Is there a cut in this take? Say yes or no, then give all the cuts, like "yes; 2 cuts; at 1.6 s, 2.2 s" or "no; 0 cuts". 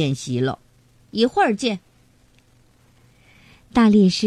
no; 0 cuts